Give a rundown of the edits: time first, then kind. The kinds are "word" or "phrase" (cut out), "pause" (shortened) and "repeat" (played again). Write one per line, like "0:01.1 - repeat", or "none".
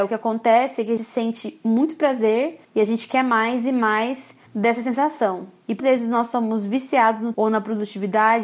0:01.0 - word
0:02.6 - pause
0:04.5 - pause
0:05.8 - word
0:07.3 - word